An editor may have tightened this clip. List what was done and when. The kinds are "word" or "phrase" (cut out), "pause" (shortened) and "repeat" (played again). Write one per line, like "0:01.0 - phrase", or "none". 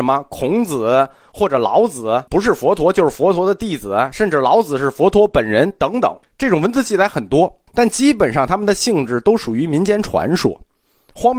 0:02.3 - pause
0:06.2 - pause
0:07.7 - pause